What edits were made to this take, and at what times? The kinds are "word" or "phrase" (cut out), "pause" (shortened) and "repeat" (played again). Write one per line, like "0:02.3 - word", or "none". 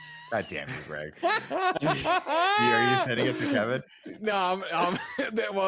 none